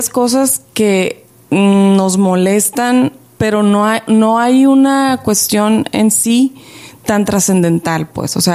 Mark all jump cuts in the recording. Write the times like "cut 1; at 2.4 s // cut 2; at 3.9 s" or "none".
none